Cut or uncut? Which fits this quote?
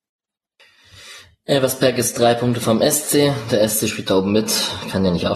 uncut